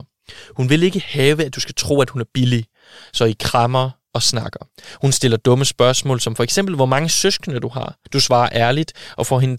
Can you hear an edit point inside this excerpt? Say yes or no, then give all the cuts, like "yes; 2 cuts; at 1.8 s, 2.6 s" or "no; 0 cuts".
yes; 1 cut; at 8.1 s